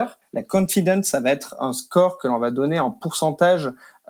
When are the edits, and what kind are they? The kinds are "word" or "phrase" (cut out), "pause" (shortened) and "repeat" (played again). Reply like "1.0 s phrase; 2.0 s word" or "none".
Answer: none